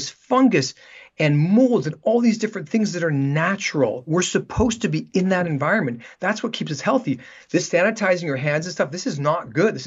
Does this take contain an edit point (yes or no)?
no